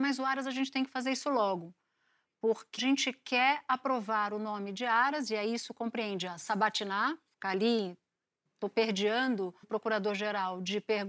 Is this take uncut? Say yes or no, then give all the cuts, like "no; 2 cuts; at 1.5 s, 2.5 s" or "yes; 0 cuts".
no; 2 cuts; at 2.8 s, 9.6 s